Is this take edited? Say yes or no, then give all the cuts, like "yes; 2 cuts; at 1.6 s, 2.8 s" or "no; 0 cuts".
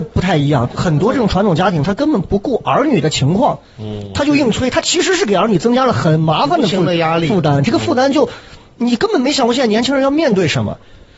no; 0 cuts